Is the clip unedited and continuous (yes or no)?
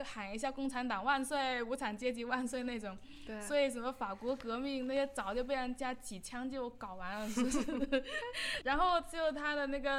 no